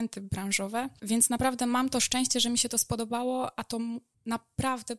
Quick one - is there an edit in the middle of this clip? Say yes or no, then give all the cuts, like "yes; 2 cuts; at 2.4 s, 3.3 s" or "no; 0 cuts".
no; 0 cuts